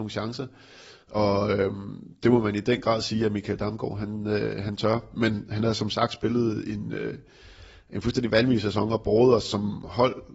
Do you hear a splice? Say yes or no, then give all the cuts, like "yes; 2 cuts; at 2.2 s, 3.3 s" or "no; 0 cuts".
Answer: no; 0 cuts